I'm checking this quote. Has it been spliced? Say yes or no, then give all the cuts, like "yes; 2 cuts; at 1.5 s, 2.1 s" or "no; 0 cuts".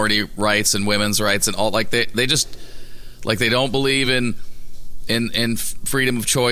no; 0 cuts